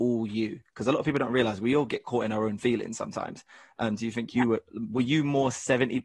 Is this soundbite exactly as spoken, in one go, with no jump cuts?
yes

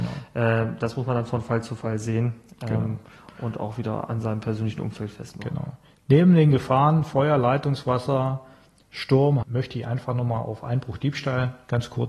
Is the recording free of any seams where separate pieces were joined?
no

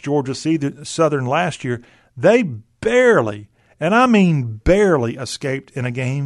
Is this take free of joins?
yes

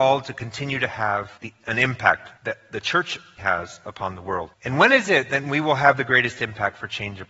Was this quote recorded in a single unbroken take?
no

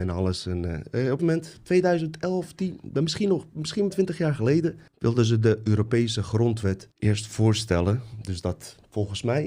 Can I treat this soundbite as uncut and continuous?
no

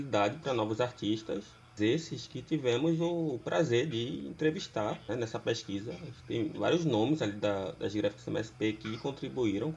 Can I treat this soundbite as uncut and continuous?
no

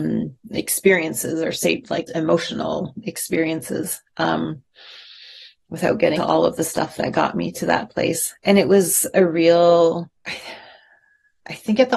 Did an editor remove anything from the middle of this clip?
yes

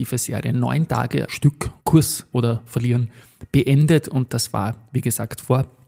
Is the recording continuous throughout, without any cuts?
no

